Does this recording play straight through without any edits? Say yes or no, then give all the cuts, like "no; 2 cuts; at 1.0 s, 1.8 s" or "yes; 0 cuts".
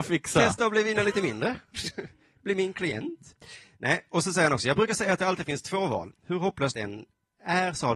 no; 1 cut; at 6.7 s